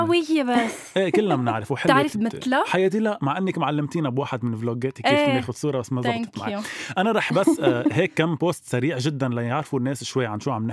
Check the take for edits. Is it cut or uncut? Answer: cut